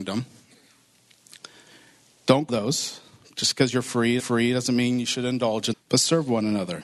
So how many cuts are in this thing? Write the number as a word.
three